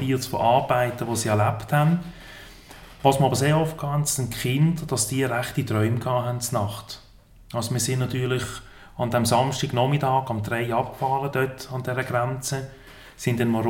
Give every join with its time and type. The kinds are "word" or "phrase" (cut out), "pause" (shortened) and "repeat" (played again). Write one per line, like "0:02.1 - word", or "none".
none